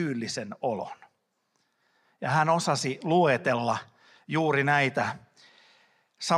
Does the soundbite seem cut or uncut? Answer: uncut